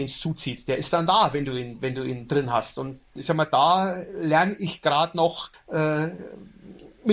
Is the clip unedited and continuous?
no; 1 cut; at 5.5 s

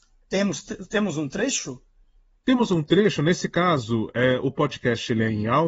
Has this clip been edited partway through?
no; 0 cuts

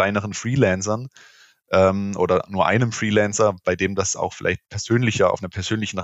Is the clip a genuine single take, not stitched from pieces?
yes; 0 cuts

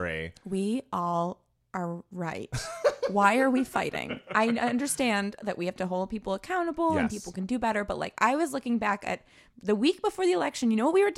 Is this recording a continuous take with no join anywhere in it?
yes; 0 cuts

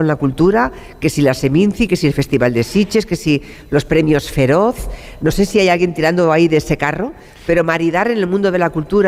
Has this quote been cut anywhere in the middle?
no; 0 cuts

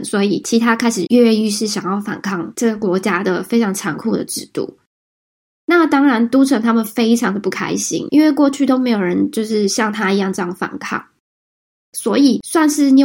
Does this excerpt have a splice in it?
no; 0 cuts

